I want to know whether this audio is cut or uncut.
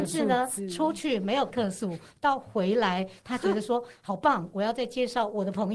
cut